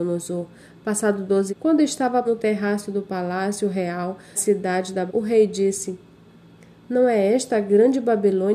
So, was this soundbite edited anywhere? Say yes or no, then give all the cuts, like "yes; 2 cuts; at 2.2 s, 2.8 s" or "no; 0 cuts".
yes; 4 cuts; at 1.5 s, 2.2 s, 4.4 s, 5.1 s